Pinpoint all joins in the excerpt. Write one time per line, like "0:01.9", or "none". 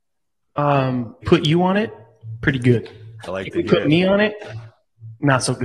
0:01.2
0:03.3